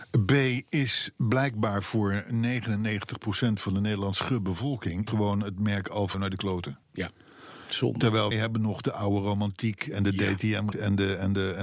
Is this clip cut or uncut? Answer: cut